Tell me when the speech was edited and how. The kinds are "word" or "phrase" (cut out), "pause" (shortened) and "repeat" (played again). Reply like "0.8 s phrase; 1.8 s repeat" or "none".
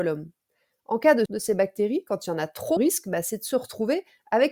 1.3 s word; 2.8 s word